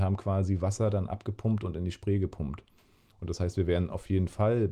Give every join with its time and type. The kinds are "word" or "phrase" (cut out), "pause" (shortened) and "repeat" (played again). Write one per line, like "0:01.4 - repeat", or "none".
none